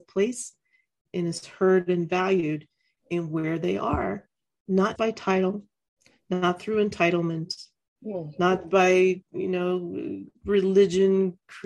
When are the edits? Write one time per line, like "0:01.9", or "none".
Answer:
0:05.0